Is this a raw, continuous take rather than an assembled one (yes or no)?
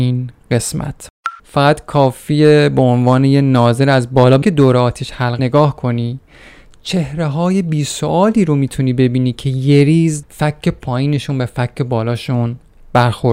no